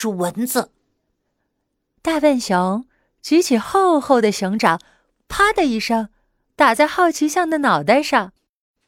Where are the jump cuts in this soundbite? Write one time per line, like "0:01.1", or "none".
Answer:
none